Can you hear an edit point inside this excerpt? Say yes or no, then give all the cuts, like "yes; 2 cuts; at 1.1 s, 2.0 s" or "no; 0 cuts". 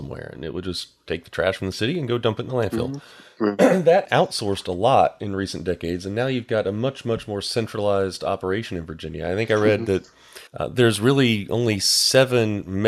yes; 2 cuts; at 4.0 s, 10.5 s